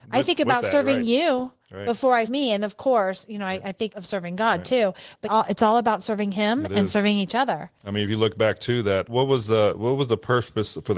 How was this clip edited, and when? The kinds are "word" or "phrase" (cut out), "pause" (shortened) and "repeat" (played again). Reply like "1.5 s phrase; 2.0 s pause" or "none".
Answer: 2.3 s word; 3.9 s word; 5.2 s phrase; 9.1 s word